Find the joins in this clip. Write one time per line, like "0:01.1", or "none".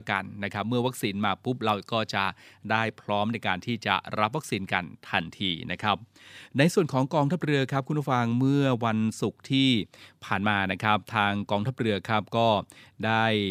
none